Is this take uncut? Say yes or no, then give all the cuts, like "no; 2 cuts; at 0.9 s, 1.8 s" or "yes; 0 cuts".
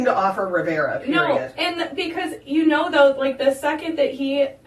yes; 0 cuts